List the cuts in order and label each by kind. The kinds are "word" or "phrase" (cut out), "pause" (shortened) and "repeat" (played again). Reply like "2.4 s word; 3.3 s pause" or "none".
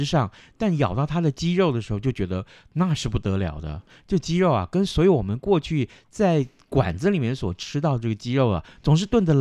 none